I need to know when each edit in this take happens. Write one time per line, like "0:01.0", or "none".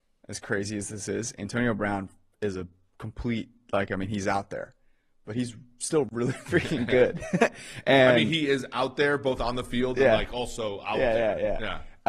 none